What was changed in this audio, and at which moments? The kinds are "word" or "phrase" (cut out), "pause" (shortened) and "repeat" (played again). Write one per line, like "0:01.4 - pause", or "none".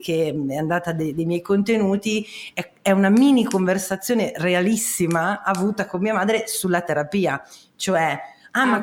none